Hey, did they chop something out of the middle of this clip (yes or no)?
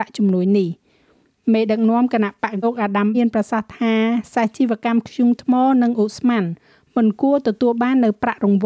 yes